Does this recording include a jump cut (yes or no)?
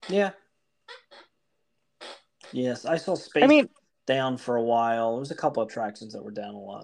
no